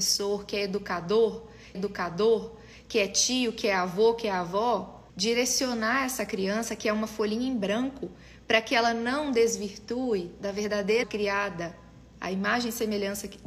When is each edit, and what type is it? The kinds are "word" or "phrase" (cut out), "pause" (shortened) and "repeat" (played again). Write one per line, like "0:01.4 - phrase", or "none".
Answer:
0:01.7 - repeat
0:05.1 - pause
0:11.0 - word